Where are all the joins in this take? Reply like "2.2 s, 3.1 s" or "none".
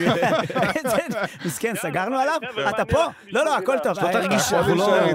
3.4 s

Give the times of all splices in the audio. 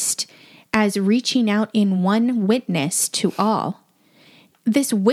none

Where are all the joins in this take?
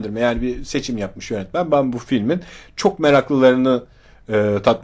none

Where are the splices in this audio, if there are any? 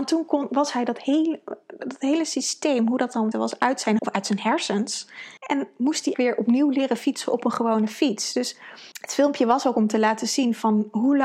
3.3 s, 4.0 s, 5.4 s, 6.1 s, 8.9 s

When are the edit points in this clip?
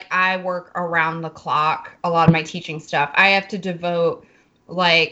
2.3 s

